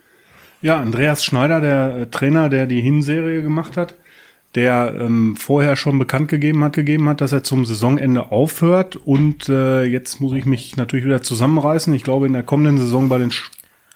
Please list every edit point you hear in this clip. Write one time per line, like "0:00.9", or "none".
0:06.7